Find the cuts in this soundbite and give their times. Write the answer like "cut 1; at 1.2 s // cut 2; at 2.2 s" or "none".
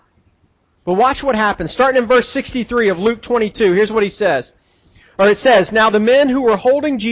none